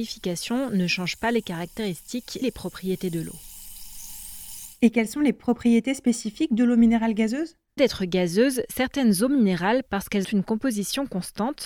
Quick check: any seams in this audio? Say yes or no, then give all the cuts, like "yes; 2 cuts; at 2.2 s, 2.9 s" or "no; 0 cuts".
yes; 3 cuts; at 2.4 s, 7.8 s, 10.2 s